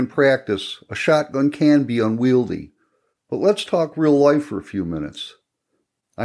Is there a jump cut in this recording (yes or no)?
no